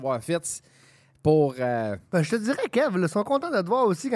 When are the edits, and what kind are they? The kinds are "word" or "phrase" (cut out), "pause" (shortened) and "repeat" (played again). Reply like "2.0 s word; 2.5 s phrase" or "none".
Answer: none

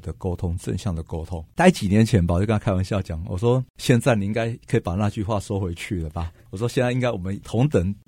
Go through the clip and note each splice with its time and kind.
1.5 s pause; 6.4 s pause

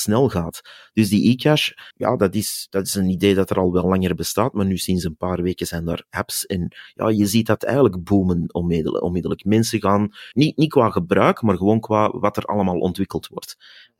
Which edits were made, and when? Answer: 1.9 s pause; 10.3 s pause

